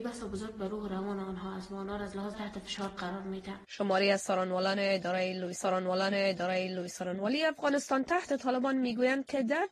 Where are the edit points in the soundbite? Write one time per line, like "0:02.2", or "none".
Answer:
0:02.3
0:03.6
0:05.6
0:08.3